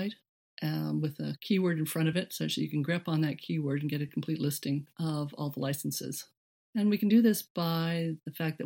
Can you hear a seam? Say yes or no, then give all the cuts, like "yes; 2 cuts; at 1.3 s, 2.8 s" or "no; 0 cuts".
no; 0 cuts